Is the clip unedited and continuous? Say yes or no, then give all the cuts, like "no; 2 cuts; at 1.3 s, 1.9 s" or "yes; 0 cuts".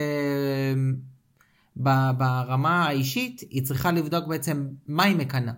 yes; 0 cuts